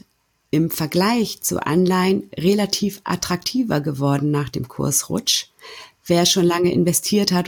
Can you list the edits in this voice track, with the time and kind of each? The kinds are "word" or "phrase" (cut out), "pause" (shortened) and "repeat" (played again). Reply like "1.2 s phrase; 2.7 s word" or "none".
none